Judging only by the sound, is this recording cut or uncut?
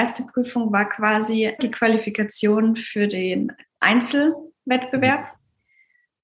cut